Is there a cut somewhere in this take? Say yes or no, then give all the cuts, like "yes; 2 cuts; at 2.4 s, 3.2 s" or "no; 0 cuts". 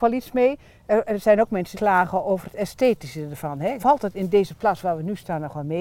yes; 2 cuts; at 1.7 s, 3.8 s